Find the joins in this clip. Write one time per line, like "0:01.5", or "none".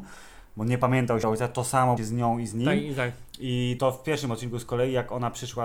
0:01.2
0:02.0
0:03.8